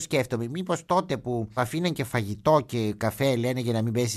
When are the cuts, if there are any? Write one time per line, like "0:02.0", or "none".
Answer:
none